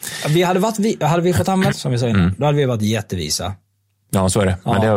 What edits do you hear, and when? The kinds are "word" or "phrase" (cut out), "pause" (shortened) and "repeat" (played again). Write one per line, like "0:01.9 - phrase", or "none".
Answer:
0:01.7 - word